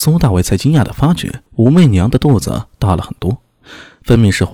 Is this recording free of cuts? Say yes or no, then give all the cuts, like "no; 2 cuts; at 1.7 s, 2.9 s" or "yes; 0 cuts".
no; 1 cut; at 1.5 s